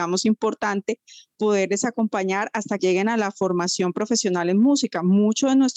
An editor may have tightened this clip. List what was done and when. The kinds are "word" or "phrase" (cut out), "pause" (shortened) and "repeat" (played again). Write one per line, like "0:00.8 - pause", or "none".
0:01.4 - word
0:02.8 - word